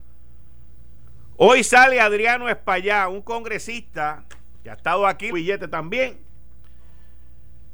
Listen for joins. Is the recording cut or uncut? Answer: cut